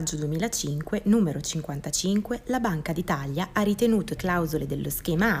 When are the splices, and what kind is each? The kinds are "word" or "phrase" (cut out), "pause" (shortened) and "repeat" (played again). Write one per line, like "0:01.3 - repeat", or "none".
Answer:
0:04.2 - word